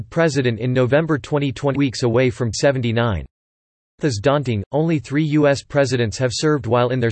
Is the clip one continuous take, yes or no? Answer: no